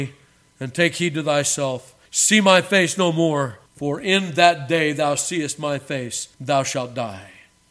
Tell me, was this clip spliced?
yes; 3 cuts; at 2.0 s, 3.7 s, 6.3 s

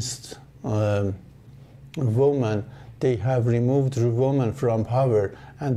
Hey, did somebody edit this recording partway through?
no; 0 cuts

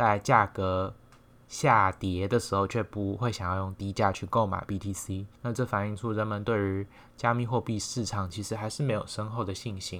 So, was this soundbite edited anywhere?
yes; 1 cut; at 5.3 s

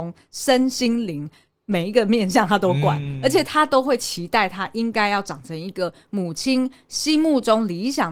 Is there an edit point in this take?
no; 0 cuts

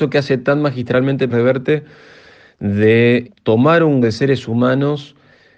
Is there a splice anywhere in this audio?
yes; 3 cuts; at 1.3 s, 3.2 s, 4.0 s

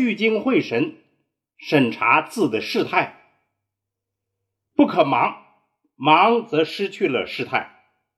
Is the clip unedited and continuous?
yes; 0 cuts

